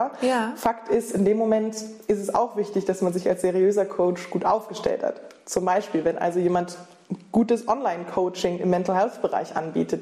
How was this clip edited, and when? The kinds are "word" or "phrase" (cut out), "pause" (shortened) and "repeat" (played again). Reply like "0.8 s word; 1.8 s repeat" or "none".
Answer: none

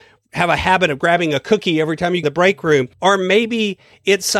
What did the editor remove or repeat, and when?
2.2 s phrase; 2.9 s pause

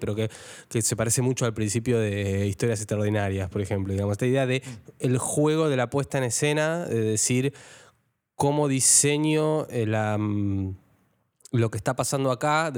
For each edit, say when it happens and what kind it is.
none

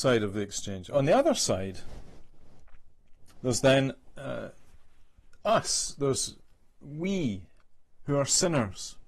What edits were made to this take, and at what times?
none

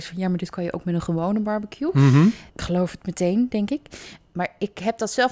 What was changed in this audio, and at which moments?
2.5 s pause

